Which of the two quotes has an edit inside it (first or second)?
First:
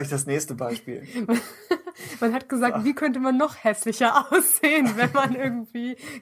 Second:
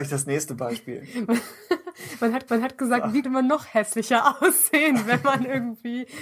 second